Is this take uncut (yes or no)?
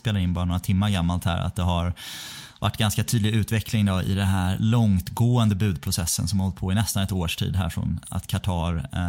no